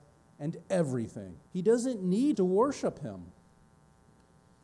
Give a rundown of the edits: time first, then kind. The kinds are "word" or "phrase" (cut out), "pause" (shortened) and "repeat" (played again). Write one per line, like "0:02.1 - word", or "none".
0:01.5 - pause
0:02.3 - word